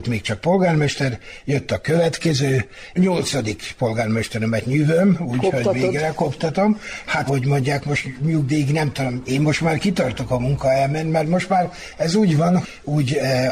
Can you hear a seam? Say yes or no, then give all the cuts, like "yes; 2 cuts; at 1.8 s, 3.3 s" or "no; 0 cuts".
yes; 2 cuts; at 3.0 s, 7.3 s